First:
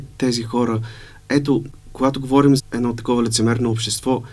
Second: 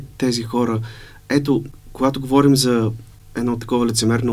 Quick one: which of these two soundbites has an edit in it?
first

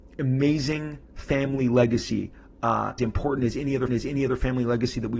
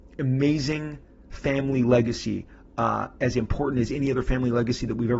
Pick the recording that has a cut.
first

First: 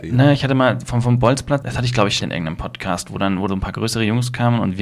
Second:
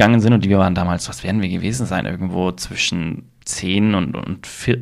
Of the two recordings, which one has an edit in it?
first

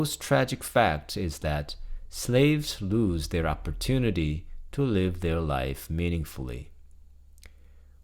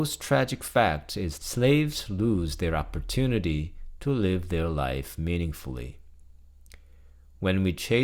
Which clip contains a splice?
second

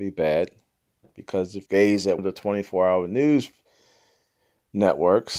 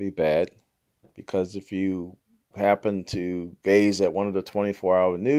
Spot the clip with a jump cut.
first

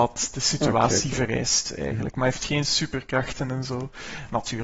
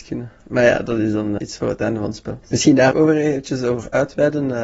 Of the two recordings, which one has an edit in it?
second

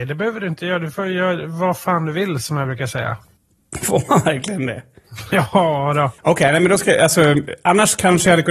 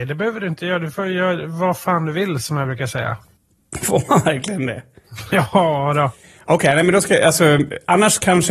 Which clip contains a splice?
first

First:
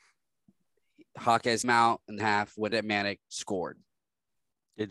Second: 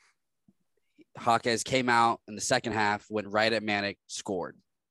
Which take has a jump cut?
first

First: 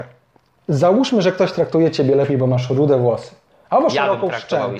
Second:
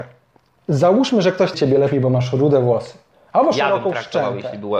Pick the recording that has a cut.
second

